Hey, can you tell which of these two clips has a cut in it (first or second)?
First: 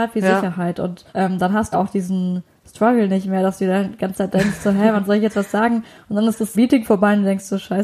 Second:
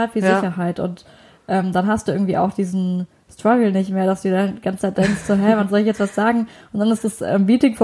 first